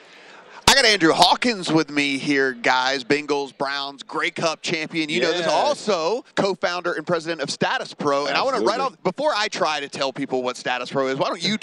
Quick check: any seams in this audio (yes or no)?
yes